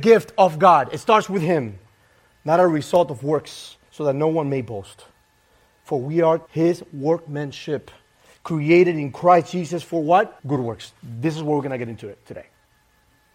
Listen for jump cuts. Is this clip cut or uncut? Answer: cut